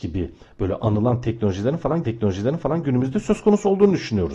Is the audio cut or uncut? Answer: cut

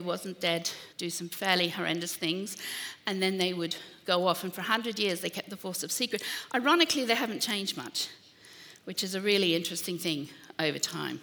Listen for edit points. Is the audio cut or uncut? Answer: cut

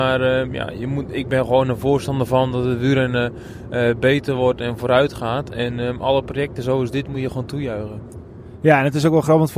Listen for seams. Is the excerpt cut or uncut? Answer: uncut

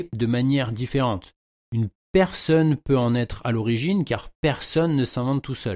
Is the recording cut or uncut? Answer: uncut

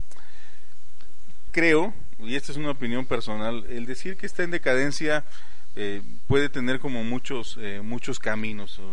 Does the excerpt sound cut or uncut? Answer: cut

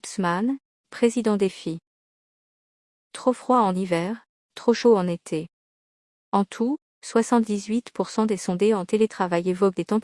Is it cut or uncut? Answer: uncut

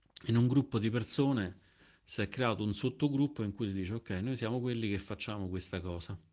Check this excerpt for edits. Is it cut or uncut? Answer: uncut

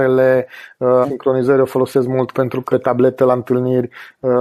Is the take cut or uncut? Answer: cut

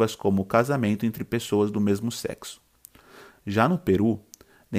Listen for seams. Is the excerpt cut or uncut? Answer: uncut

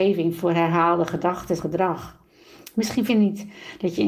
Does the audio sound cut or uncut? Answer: cut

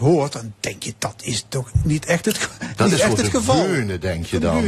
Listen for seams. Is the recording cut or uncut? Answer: uncut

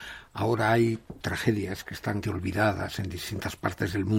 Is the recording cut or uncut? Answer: cut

